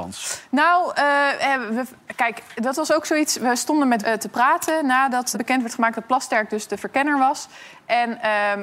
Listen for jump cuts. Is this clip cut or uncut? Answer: cut